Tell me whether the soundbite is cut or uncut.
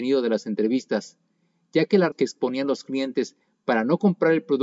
cut